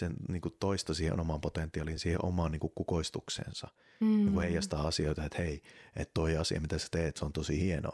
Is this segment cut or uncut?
uncut